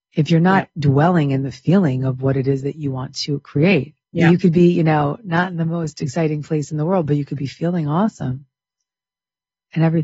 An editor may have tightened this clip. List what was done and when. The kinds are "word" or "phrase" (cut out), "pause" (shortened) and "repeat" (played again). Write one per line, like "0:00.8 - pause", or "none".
0:04.0 - pause